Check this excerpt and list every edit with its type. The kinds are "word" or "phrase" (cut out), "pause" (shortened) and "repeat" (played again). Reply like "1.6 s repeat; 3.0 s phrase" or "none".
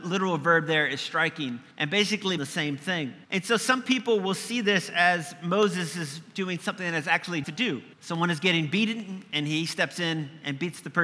1.7 s pause; 2.4 s phrase; 3.2 s pause; 7.4 s word; 7.9 s pause